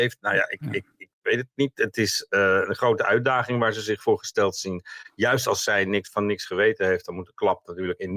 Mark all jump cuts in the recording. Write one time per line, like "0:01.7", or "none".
0:01.1